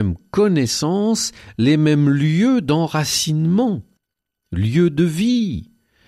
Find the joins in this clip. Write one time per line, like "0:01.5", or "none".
none